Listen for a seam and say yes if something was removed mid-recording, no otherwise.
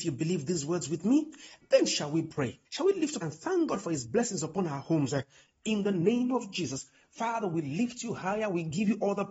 yes